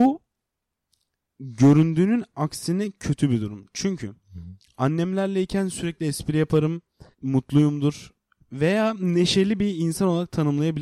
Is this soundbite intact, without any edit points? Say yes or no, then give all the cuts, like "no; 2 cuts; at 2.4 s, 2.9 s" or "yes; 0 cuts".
no; 1 cut; at 7.1 s